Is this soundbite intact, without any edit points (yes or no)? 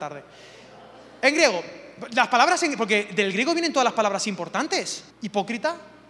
no